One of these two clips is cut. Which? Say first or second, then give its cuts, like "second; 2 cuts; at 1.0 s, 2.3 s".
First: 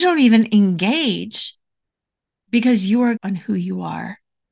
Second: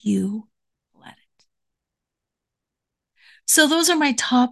first; 1 cut; at 3.2 s